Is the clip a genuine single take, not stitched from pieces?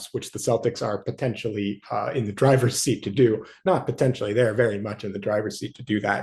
yes; 0 cuts

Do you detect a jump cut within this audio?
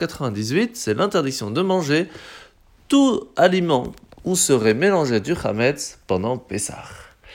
no; 0 cuts

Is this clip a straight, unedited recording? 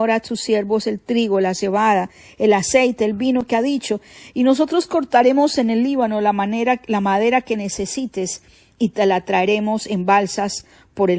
yes; 0 cuts

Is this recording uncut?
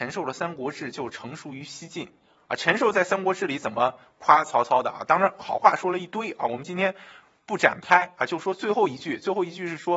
yes; 0 cuts

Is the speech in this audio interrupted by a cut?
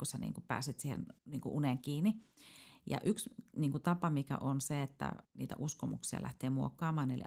yes; 2 cuts; at 1.2 s, 5.2 s

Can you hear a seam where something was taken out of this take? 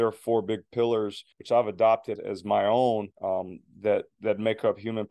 yes; 3 cuts; at 1.3 s, 2.2 s, 3.1 s

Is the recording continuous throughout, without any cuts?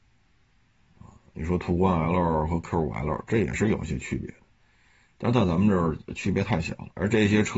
yes; 0 cuts

